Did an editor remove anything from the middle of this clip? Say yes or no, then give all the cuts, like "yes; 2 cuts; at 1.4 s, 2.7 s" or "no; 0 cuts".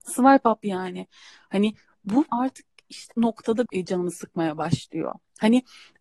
yes; 3 cuts; at 2.3 s, 3.1 s, 3.7 s